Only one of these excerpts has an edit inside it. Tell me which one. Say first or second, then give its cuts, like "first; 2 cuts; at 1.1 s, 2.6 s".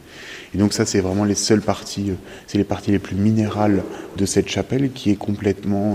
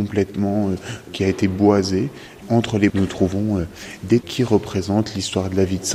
second; 4 cuts; at 1.1 s, 2.4 s, 2.9 s, 4.2 s